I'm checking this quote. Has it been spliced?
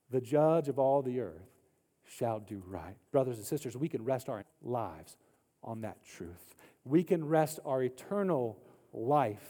yes; 2 cuts; at 3.1 s, 4.4 s

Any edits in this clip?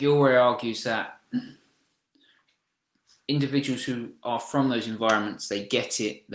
no; 0 cuts

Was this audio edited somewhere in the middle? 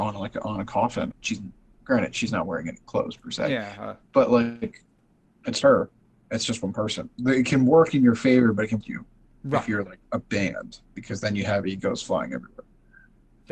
yes; 5 cuts; at 1.1 s, 2.8 s, 4.0 s, 5.6 s, 8.8 s

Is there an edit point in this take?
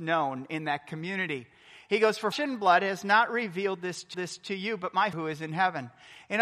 yes; 3 cuts; at 2.3 s, 4.1 s, 5.1 s

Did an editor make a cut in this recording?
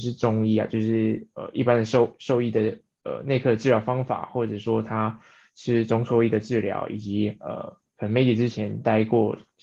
no; 0 cuts

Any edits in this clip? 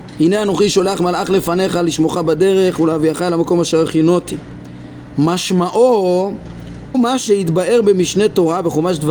yes; 1 cut; at 6.9 s

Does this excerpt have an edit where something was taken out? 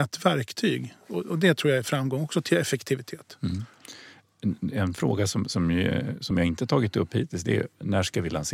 no; 0 cuts

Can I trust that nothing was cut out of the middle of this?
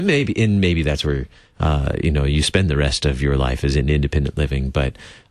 yes; 0 cuts

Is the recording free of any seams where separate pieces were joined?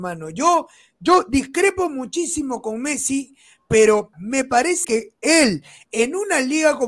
no; 2 cuts; at 4.1 s, 4.8 s

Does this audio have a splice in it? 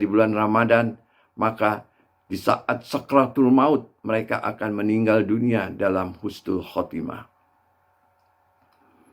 no; 0 cuts

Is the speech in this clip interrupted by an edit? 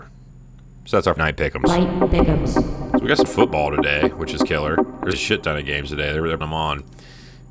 yes; 5 cuts; at 1.2 s, 2.1 s, 3.3 s, 5.1 s, 6.4 s

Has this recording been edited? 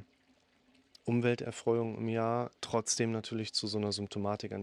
yes; 1 cut; at 2.6 s

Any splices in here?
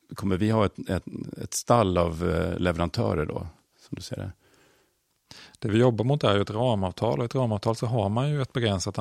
no; 0 cuts

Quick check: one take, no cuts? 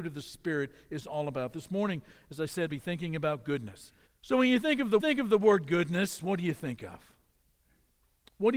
no; 3 cuts; at 2.7 s, 4.1 s, 5.0 s

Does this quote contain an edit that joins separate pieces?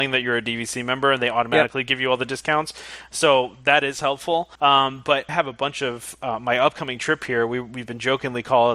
yes; 2 cuts; at 4.5 s, 5.3 s

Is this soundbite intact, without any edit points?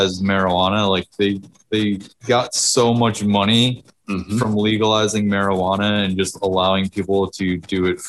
yes; 0 cuts

